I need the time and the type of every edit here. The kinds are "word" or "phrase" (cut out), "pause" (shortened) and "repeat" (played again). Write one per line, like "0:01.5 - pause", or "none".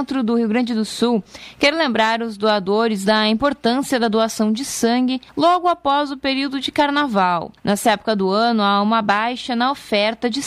0:05.3 - pause
0:07.6 - pause